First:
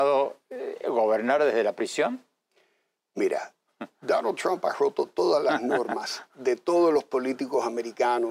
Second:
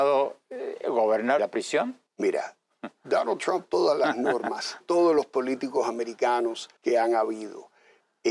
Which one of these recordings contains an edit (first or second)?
second